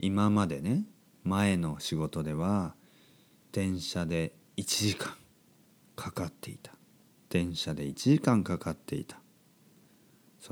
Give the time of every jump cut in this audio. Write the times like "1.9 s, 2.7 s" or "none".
none